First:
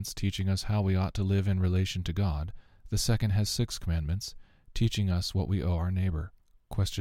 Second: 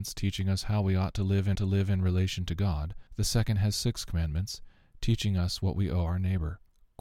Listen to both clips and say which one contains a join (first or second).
second